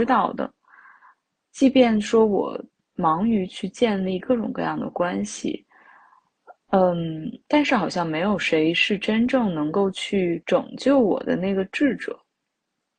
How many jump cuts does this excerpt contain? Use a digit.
3